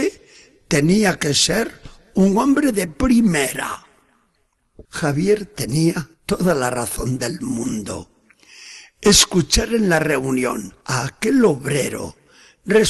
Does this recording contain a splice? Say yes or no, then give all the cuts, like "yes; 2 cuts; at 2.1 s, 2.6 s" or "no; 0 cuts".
yes; 3 cuts; at 4.8 s, 6.1 s, 10.8 s